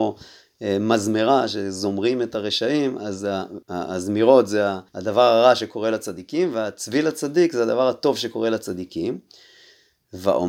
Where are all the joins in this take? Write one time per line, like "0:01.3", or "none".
0:03.6
0:04.9